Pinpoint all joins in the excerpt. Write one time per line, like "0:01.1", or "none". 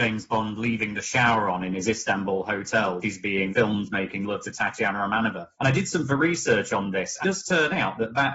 0:03.0
0:03.5
0:05.5
0:06.1
0:07.2